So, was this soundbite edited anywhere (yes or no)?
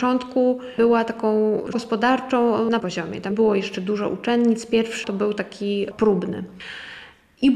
yes